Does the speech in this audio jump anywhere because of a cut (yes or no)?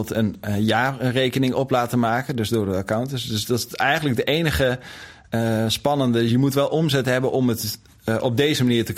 no